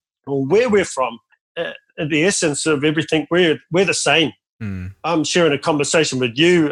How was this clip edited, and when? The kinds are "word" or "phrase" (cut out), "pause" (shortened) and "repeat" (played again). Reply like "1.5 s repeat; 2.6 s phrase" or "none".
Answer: none